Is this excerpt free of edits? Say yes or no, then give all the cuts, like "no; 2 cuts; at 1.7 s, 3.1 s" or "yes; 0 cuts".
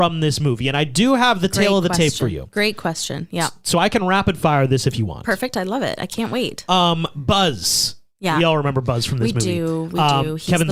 yes; 0 cuts